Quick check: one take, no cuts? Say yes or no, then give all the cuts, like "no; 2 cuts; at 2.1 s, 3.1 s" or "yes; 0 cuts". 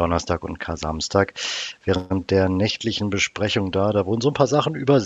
yes; 0 cuts